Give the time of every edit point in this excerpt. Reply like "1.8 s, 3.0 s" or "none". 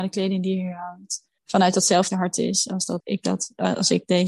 2.1 s, 3.0 s